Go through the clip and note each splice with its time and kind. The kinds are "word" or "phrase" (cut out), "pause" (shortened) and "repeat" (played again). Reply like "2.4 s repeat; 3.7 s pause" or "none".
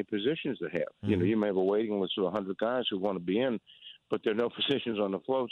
none